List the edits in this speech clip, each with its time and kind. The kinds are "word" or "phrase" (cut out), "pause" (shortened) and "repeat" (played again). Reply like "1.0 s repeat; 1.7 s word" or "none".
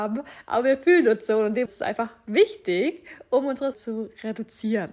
1.7 s word; 3.7 s word